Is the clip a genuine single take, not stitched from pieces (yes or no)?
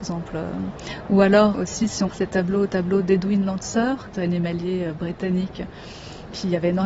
no